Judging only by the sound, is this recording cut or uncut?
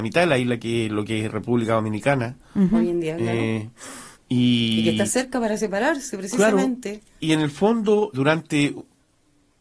cut